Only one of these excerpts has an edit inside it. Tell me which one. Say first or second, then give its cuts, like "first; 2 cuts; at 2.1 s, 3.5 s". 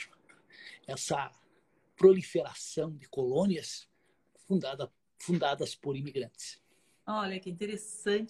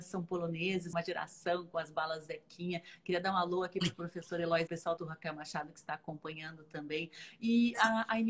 second; 3 cuts; at 0.9 s, 4.7 s, 5.0 s